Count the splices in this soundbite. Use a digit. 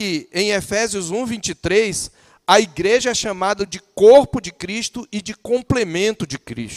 0